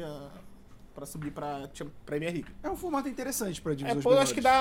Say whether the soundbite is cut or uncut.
uncut